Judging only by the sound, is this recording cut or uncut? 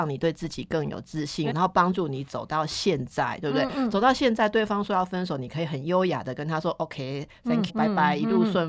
cut